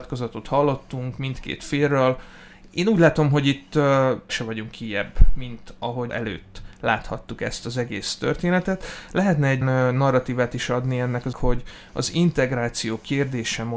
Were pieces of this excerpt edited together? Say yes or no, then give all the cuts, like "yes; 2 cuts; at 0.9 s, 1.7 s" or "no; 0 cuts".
yes; 4 cuts; at 4.3 s, 6.1 s, 9.6 s, 11.3 s